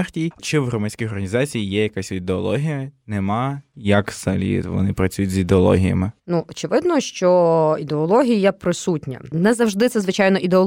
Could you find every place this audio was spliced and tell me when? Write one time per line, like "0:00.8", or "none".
0:06.2